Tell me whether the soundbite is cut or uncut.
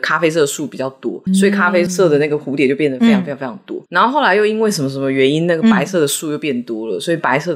cut